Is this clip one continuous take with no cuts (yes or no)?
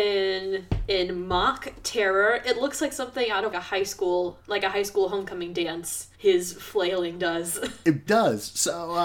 no